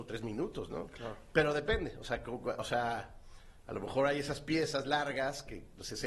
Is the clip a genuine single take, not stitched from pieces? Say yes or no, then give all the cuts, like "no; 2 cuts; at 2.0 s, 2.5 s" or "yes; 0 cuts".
yes; 0 cuts